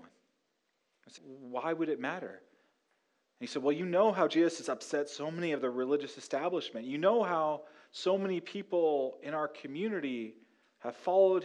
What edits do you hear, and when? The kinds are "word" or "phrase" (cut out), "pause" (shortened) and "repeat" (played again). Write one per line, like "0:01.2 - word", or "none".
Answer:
0:01.2 - word